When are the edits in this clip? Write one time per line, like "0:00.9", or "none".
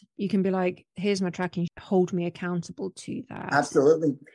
0:01.7